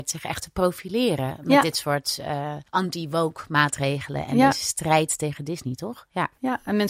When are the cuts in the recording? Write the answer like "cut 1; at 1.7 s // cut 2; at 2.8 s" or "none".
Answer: cut 1; at 2.7 s